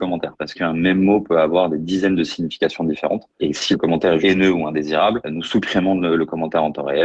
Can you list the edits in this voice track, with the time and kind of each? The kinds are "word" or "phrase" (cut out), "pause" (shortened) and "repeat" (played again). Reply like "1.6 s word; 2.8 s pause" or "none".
4.2 s word